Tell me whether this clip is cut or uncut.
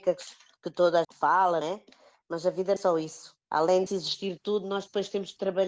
cut